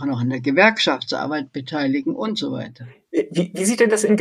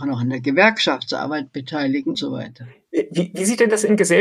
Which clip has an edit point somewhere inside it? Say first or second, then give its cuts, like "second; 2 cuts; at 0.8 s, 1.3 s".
second; 1 cut; at 2.1 s